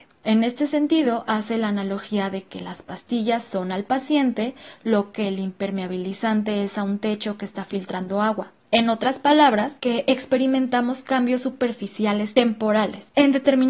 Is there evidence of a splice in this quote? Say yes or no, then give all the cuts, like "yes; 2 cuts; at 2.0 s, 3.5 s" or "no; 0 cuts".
no; 0 cuts